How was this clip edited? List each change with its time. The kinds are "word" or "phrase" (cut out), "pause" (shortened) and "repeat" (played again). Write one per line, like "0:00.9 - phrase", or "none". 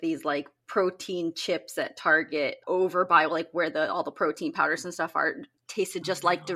0:02.6 - word